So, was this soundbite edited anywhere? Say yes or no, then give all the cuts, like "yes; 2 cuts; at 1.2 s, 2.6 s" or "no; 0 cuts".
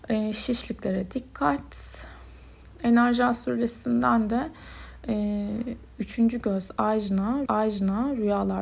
yes; 1 cut; at 7.5 s